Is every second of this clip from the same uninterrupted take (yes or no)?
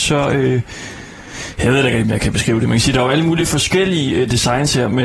yes